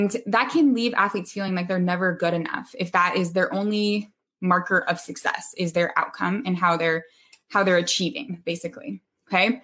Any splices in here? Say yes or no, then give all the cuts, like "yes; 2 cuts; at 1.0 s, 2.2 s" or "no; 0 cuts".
no; 0 cuts